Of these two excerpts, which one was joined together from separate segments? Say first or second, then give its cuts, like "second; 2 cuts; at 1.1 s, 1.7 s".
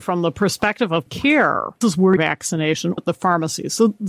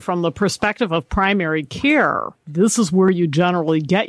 first; 4 cuts; at 1.1 s, 1.8 s, 2.2 s, 3.0 s